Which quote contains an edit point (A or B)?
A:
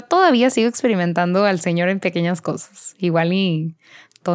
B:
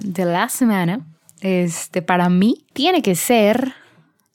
B